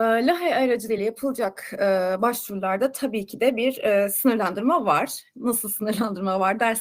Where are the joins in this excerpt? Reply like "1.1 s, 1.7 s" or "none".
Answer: none